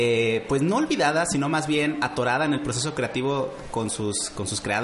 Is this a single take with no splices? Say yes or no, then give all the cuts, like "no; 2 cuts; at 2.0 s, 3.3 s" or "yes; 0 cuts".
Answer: yes; 0 cuts